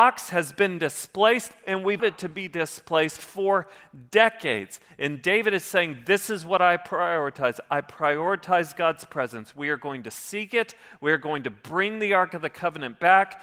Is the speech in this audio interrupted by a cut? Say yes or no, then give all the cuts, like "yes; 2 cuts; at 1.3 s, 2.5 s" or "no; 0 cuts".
yes; 1 cut; at 2.0 s